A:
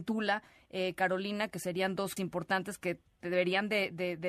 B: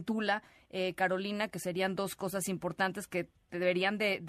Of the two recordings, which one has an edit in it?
A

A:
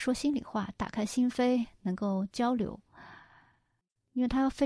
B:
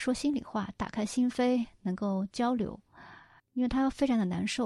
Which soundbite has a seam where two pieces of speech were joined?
B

